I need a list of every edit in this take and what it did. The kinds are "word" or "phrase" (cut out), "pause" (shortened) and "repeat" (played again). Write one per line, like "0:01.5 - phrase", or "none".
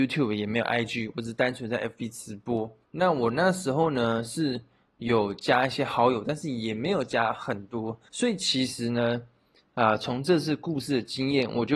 0:02.8 - pause
0:08.1 - pause